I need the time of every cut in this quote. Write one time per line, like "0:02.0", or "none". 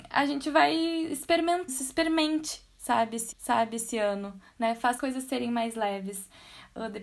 0:01.7
0:03.3
0:05.0